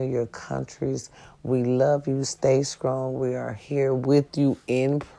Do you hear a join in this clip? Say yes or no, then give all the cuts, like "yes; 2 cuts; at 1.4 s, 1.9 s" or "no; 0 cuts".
no; 0 cuts